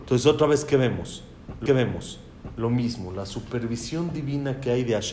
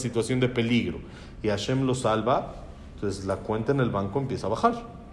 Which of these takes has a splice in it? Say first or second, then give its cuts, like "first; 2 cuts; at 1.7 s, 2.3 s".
first; 1 cut; at 1.7 s